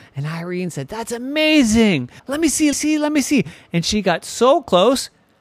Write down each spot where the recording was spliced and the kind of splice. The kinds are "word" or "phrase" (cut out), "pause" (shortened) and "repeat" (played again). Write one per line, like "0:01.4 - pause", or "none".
0:02.2 - pause
0:02.7 - phrase